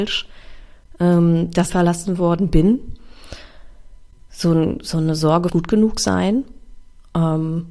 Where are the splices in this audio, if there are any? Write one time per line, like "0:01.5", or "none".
0:01.7
0:05.5